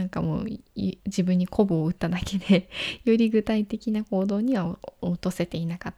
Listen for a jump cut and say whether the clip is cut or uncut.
cut